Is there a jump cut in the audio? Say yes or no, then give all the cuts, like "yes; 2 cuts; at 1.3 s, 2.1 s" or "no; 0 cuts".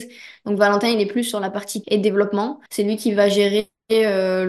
yes; 2 cuts; at 1.8 s, 2.7 s